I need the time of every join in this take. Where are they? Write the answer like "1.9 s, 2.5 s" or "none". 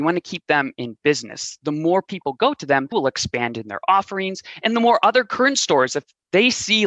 2.9 s